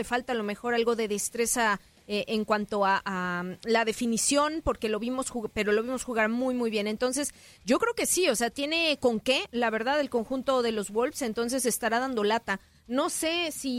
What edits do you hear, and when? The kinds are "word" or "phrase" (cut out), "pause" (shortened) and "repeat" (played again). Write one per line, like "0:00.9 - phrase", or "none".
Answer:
none

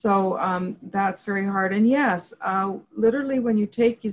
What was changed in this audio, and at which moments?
0:02.8 - pause

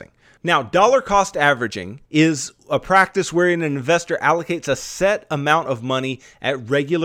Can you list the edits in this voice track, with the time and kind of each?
0:02.0 - pause

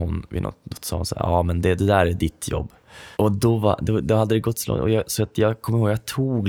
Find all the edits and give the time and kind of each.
0:03.1 - pause

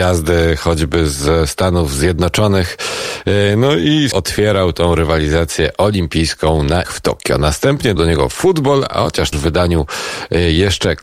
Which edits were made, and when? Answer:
0:04.1 - word
0:06.8 - word
0:08.0 - word
0:09.3 - word

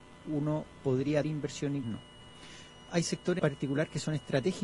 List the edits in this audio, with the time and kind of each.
0:01.2 - word
0:01.8 - word
0:02.9 - word
0:03.4 - word

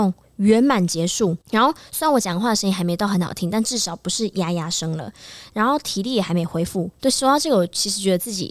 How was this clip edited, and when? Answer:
0:01.4 - pause
0:06.9 - pause

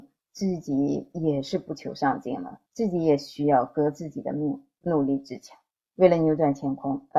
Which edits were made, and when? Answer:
0:02.7 - pause
0:04.8 - phrase
0:05.7 - pause

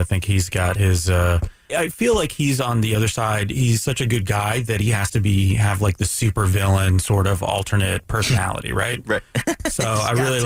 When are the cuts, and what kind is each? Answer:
0:01.7 - word

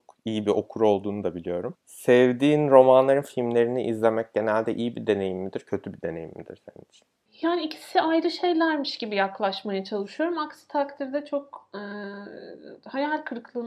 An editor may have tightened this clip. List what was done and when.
none

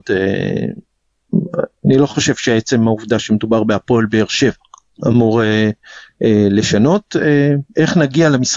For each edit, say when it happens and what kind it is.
0:01.8 - pause

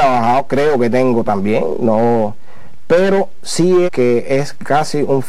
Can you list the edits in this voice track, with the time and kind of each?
0:01.3 - word
0:03.9 - phrase

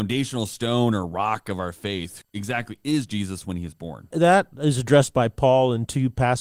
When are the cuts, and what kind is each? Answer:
0:02.2 - word
0:04.1 - word

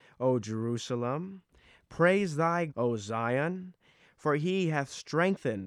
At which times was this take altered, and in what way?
0:02.7 - word

